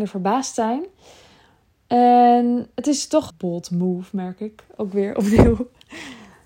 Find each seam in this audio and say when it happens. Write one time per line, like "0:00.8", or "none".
0:03.3